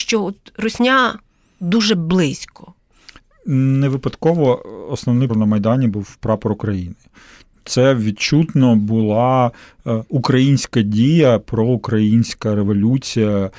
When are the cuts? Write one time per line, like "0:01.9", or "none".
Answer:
0:05.3

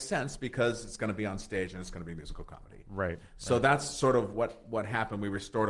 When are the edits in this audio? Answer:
none

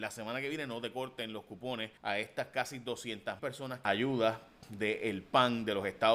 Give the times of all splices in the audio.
0:02.0
0:03.4
0:03.8

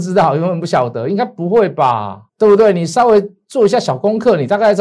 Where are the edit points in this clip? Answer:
0:02.3

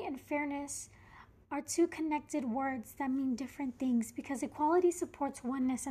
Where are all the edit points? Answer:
none

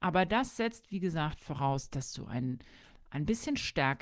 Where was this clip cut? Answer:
none

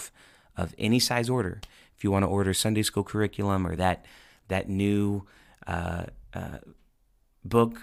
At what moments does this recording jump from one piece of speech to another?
none

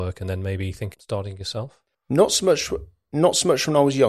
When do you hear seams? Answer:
0:00.9
0:01.9

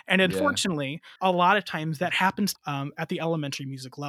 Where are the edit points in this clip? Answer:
0:01.2
0:02.6

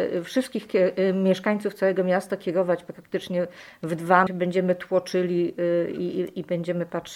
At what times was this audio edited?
0:04.3

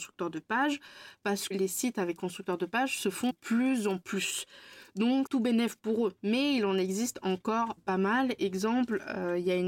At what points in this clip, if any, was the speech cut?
0:01.5
0:02.2
0:03.3
0:05.3
0:06.2
0:07.8

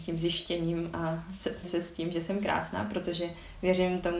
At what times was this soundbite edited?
0:01.6

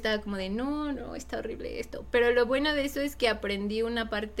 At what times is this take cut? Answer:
0:00.9

